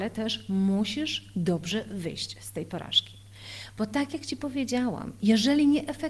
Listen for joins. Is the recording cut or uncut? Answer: uncut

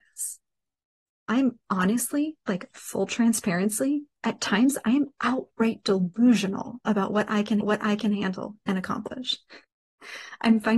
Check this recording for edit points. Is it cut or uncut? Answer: cut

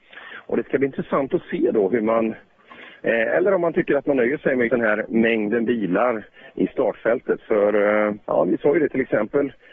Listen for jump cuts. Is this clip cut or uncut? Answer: cut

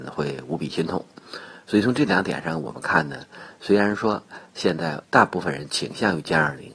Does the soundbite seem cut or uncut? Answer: cut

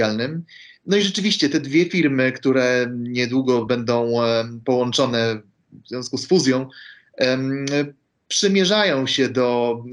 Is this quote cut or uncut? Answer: uncut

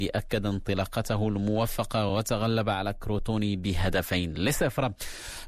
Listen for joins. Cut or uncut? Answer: uncut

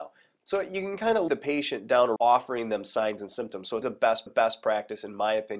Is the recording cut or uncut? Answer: cut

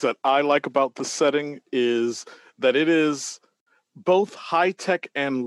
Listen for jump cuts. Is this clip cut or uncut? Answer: uncut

